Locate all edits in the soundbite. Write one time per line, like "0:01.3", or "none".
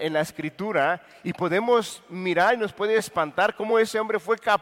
none